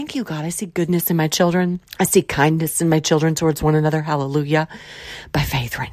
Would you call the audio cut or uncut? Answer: cut